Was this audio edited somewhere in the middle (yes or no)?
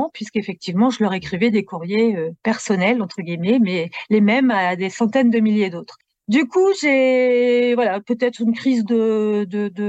no